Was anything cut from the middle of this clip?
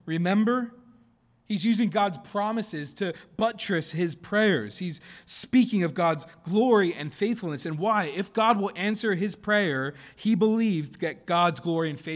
no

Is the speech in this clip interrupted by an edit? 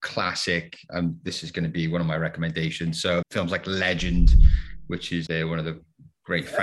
yes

